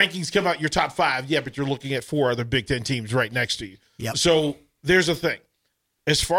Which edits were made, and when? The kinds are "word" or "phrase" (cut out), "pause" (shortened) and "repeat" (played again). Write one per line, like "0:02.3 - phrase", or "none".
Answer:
none